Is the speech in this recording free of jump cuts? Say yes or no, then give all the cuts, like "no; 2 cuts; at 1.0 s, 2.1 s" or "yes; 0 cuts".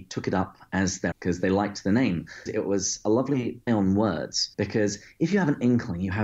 no; 4 cuts; at 1.1 s, 2.5 s, 3.7 s, 4.5 s